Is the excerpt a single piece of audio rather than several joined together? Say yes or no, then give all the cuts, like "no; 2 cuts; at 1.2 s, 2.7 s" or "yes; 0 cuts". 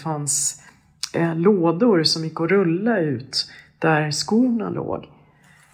yes; 0 cuts